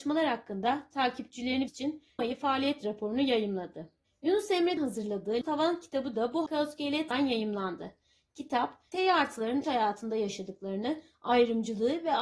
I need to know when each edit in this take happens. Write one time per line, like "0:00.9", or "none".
0:01.7
0:02.2
0:04.8
0:05.4
0:06.5
0:07.1
0:08.9
0:09.6